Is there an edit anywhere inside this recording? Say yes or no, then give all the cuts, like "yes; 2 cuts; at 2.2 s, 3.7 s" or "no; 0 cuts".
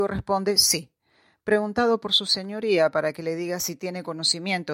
no; 0 cuts